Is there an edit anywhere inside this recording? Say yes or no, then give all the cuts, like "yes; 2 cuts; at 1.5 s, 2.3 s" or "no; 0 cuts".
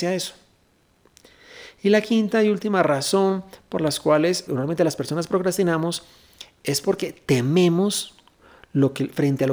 yes; 1 cut; at 4.5 s